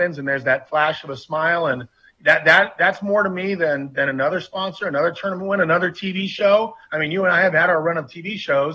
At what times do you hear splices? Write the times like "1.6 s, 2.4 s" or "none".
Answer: none

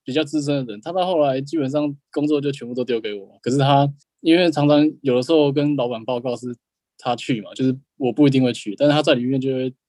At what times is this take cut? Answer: 4.0 s

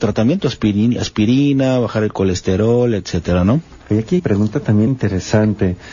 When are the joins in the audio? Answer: 4.2 s, 4.9 s

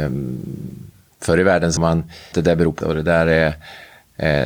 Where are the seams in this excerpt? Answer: 1.8 s, 2.3 s, 2.8 s

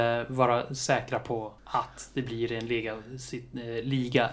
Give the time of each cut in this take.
1.6 s

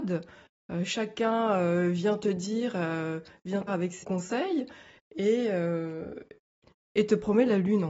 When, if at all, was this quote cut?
3.7 s, 4.0 s

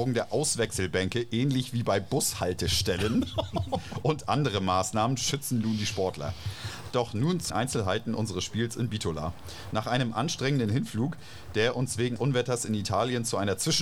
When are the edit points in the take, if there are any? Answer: 7.5 s, 12.2 s

